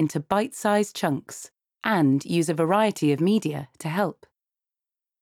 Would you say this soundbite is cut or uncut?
uncut